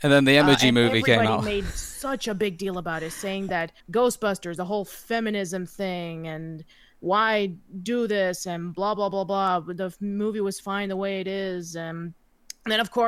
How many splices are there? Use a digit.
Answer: 1